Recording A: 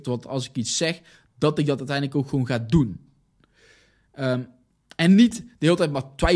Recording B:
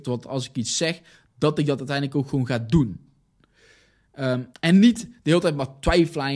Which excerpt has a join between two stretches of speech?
B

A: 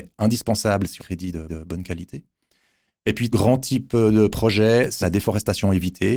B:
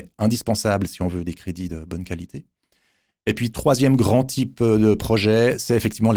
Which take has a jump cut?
A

